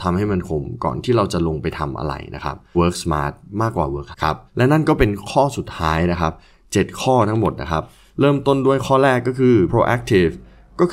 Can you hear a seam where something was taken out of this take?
yes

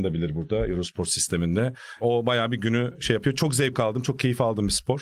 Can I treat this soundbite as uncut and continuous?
yes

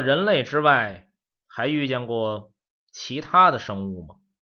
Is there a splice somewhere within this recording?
yes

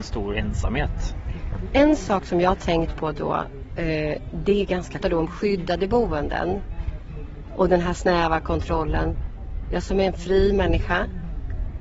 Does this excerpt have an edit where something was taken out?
yes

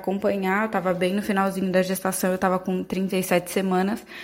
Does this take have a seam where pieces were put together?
no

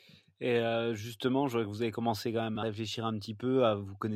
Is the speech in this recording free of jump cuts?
yes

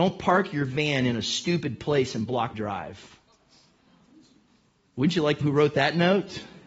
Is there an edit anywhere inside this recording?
yes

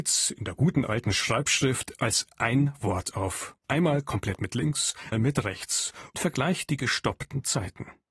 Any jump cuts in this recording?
yes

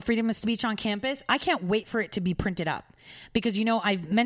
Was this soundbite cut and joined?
no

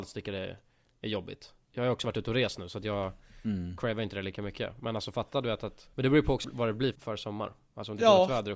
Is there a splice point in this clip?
yes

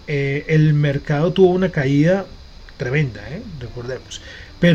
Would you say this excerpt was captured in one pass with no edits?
yes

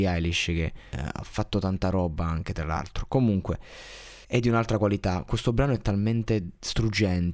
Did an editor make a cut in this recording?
yes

